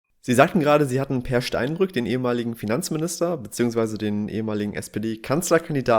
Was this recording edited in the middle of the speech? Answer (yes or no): no